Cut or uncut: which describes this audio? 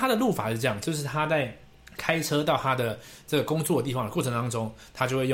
cut